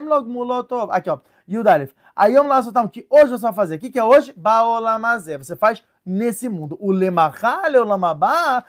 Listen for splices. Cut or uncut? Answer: uncut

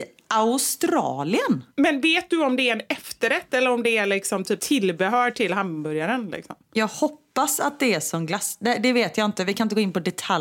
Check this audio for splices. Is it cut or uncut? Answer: cut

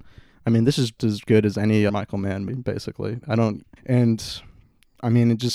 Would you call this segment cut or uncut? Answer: cut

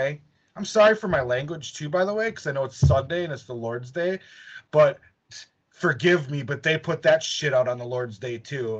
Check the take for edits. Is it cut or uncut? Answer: uncut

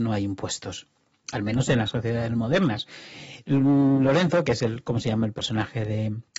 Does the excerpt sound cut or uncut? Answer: uncut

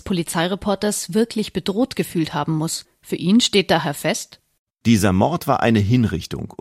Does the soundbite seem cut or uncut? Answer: uncut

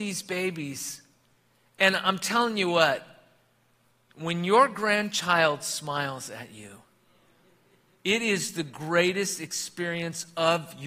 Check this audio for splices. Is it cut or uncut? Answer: uncut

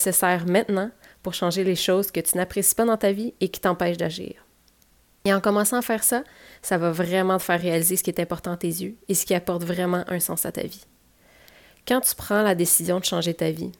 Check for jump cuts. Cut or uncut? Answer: uncut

